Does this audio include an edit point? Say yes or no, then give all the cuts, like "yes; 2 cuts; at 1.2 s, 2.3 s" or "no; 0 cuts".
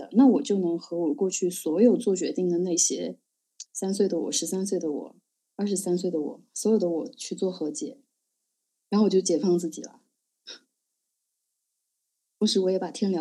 no; 0 cuts